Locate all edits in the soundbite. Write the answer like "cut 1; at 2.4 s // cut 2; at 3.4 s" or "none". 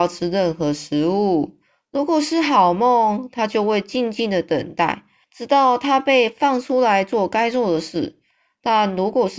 cut 1; at 5.2 s